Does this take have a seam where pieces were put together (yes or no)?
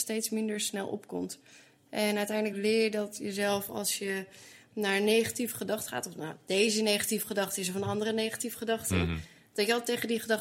no